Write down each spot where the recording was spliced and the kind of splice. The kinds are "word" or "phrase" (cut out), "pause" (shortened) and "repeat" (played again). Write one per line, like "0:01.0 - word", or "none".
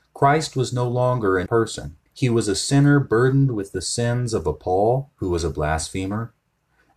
0:01.5 - word
0:02.1 - pause

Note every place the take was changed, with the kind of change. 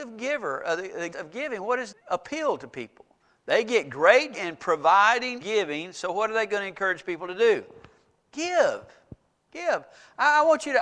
0:01.1 - word
0:01.9 - word
0:04.3 - word
0:05.4 - word

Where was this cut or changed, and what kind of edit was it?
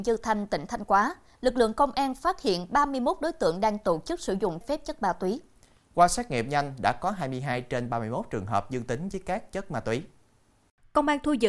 0:04.6 - word

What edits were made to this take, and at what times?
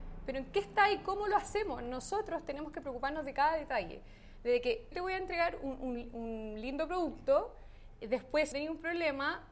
0:04.9 - phrase
0:08.5 - phrase

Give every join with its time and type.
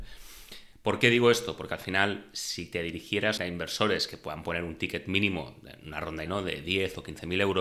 0:03.4 - word
0:06.3 - word

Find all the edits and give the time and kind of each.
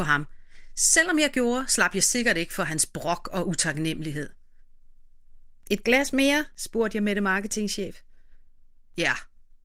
0:06.5 - pause

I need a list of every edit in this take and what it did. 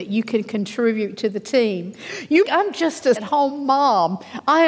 0:02.4 - phrase
0:03.2 - word

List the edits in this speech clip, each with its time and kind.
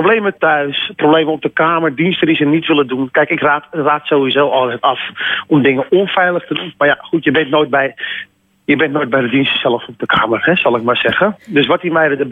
none

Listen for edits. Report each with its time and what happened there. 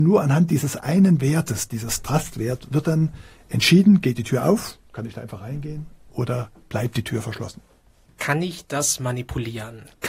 none

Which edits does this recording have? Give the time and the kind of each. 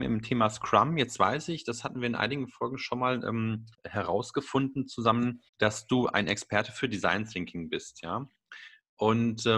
0:03.7 - pause
0:05.5 - pause

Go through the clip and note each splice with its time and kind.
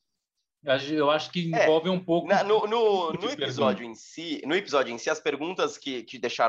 none

